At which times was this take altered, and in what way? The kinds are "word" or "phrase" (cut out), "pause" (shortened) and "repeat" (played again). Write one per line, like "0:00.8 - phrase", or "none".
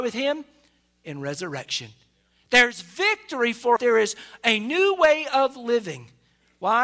0:03.8 - word